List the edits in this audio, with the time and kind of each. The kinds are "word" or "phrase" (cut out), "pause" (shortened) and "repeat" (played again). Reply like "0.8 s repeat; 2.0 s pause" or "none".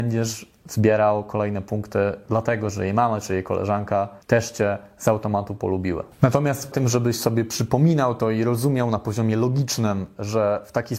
4.2 s pause; 6.7 s word